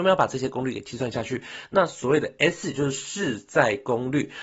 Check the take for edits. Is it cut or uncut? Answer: uncut